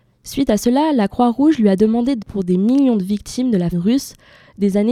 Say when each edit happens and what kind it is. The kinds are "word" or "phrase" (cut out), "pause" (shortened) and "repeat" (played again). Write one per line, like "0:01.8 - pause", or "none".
0:02.2 - word
0:03.7 - word